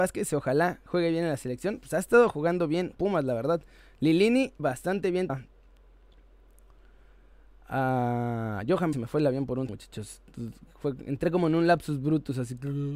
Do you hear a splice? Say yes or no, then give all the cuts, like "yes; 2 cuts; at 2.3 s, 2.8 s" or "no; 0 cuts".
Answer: yes; 5 cuts; at 3.0 s, 4.6 s, 5.3 s, 8.9 s, 9.7 s